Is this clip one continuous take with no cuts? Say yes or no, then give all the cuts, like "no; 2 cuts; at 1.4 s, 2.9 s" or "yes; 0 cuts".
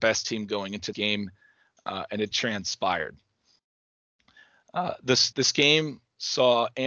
no; 3 cuts; at 0.9 s, 2.3 s, 5.3 s